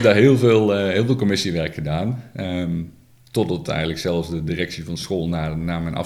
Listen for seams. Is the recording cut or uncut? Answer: uncut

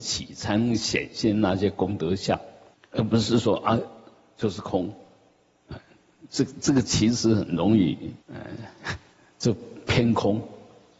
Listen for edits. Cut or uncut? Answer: cut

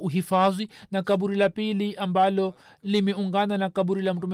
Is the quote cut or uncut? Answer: uncut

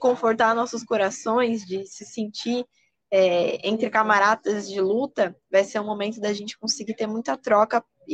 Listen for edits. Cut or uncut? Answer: uncut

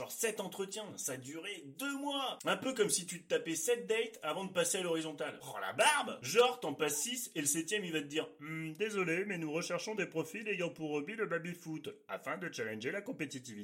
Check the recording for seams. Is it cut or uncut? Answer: uncut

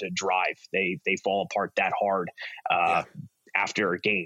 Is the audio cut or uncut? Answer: uncut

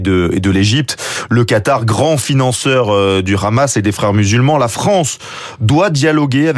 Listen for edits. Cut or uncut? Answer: uncut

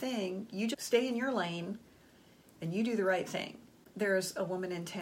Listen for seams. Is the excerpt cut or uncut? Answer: uncut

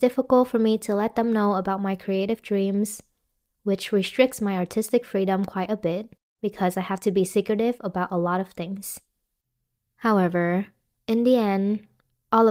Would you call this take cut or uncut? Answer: uncut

